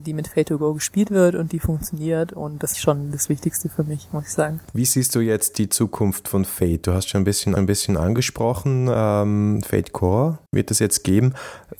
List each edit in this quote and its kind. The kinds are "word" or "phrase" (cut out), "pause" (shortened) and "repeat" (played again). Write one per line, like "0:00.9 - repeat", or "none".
0:02.7 - phrase
0:07.6 - repeat
0:10.5 - pause